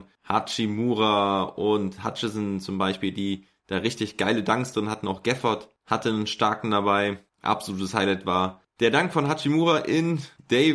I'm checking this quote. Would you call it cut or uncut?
uncut